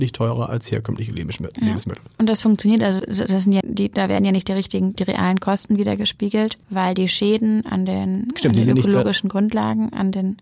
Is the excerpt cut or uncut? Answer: cut